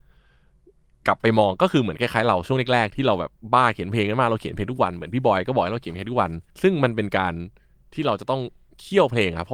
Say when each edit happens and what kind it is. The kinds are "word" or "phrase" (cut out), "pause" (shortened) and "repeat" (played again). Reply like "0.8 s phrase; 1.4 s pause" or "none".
6.5 s pause